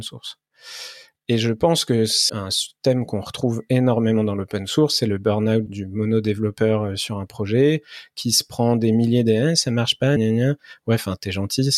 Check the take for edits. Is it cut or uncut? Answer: cut